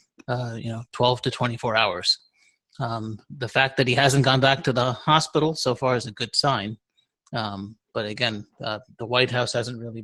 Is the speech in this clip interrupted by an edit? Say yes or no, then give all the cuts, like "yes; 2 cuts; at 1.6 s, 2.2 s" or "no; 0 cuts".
no; 0 cuts